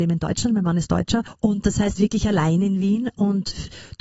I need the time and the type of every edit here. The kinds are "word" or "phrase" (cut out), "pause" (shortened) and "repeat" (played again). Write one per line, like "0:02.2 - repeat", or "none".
0:02.0 - phrase